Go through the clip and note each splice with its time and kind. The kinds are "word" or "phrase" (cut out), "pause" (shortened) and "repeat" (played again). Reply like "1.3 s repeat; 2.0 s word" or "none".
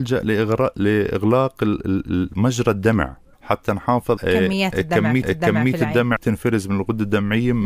3.3 s pause; 4.2 s word; 5.2 s repeat; 6.2 s word